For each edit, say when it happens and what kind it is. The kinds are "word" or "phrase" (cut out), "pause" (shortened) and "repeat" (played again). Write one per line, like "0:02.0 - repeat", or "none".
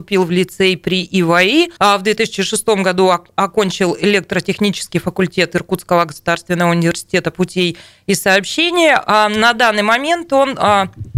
0:01.8 - pause